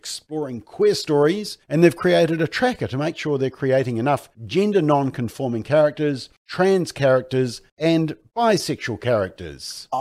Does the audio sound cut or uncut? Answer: cut